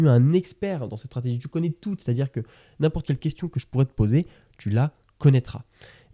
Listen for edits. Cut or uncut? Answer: cut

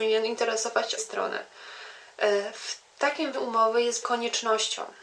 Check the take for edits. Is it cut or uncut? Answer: cut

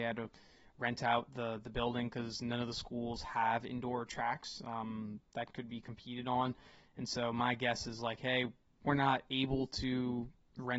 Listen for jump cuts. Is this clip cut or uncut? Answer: uncut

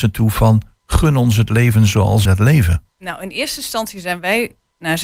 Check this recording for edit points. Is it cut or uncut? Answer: cut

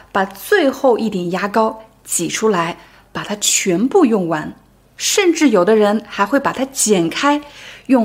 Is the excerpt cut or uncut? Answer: uncut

